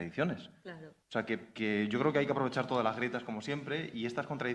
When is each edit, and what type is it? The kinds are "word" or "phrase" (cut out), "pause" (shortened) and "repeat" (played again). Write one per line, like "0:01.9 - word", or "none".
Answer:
0:01.0 - pause